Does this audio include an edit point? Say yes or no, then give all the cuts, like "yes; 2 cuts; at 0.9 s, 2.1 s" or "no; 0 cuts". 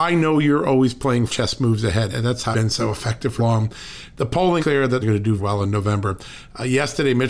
yes; 7 cuts; at 1.3 s, 2.1 s, 2.5 s, 3.4 s, 4.6 s, 5.0 s, 5.4 s